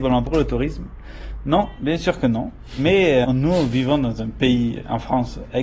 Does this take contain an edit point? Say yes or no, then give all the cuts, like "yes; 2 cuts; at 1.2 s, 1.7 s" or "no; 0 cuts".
yes; 1 cut; at 3.2 s